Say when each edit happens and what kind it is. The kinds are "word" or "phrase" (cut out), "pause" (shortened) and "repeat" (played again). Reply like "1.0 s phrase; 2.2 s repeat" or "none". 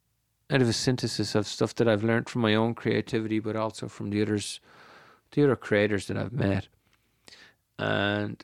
none